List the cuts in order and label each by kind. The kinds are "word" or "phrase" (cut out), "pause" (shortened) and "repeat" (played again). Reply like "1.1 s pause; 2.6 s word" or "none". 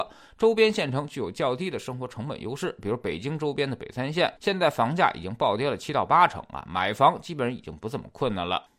4.4 s pause